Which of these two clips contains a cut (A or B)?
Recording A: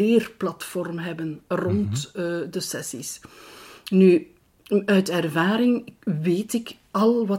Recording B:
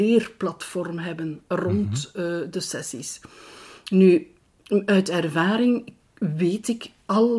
A